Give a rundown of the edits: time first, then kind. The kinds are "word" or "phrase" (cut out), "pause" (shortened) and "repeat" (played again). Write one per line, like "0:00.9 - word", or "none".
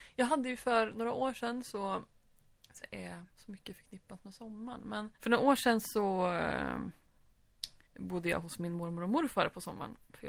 0:02.8 - phrase
0:03.3 - pause
0:05.1 - pause
0:07.8 - pause